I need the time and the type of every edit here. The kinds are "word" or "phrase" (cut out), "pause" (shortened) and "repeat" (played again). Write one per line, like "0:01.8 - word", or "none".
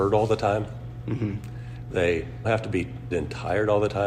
0:02.4 - word
0:03.1 - word